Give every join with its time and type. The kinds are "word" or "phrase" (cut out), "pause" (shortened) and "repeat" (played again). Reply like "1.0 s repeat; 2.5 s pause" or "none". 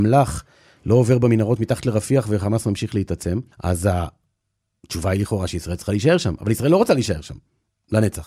3.5 s pause